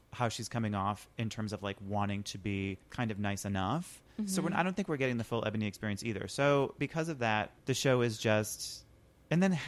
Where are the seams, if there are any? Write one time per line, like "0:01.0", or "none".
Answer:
0:02.8
0:07.6